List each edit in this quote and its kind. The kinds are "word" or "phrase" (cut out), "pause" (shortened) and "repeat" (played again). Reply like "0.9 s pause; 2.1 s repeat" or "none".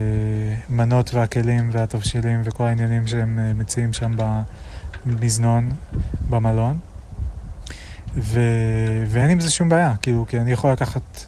none